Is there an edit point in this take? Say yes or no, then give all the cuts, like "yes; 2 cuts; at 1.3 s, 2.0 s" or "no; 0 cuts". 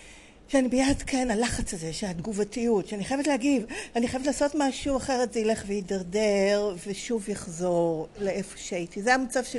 no; 0 cuts